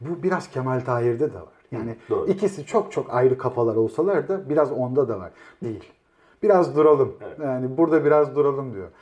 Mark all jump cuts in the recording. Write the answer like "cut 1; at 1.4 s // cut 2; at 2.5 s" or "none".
cut 1; at 5.6 s